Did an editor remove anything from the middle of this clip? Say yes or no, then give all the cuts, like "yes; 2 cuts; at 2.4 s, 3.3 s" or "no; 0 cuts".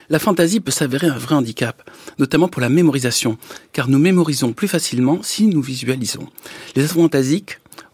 no; 0 cuts